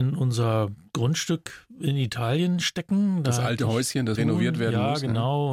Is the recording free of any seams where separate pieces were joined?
no; 1 cut; at 4.2 s

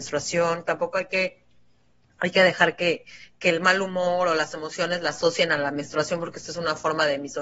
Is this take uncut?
yes; 0 cuts

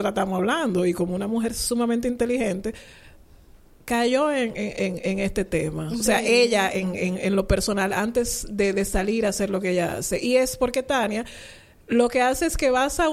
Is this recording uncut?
yes; 0 cuts

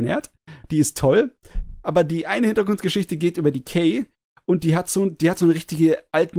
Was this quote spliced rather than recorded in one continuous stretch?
no; 0 cuts

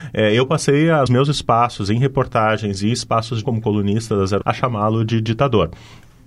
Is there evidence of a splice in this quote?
yes; 3 cuts; at 1.1 s, 3.4 s, 4.4 s

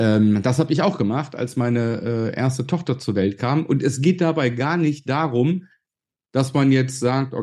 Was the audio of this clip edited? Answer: no; 0 cuts

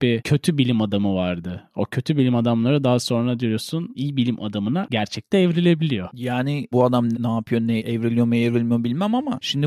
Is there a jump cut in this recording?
yes; 3 cuts; at 6.7 s, 7.1 s, 7.8 s

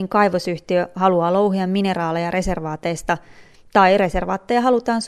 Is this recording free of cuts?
yes; 0 cuts

